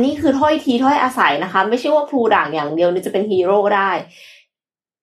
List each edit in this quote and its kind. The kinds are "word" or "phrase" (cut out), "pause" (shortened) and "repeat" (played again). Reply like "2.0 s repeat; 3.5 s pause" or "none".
none